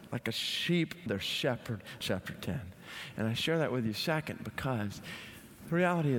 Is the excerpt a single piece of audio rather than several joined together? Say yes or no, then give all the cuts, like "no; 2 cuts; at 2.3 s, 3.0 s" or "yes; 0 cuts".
no; 2 cuts; at 1.1 s, 2.0 s